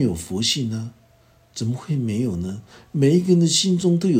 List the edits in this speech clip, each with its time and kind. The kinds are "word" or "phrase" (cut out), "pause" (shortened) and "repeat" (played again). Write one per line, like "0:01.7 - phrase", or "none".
none